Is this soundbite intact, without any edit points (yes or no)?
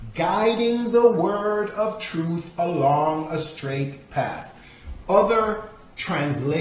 yes